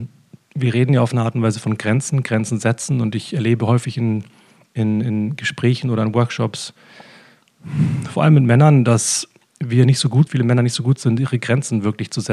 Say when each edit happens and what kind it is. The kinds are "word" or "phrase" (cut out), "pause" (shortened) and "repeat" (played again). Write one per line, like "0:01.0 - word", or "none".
0:10.3 - word